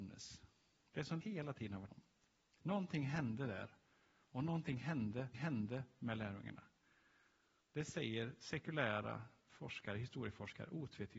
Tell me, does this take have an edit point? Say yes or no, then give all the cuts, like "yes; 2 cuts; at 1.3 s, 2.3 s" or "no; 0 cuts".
yes; 3 cuts; at 1.2 s, 1.9 s, 5.3 s